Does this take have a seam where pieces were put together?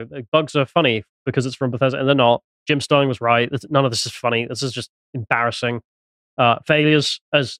no; 0 cuts

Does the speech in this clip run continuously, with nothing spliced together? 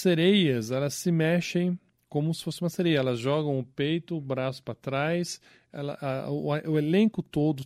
yes; 0 cuts

